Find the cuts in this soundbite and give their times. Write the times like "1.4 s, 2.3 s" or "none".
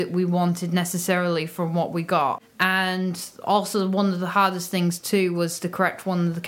none